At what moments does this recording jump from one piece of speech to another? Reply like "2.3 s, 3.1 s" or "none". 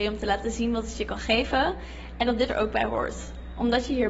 2.5 s